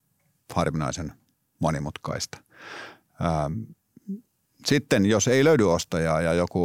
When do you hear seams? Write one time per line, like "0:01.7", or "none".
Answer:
none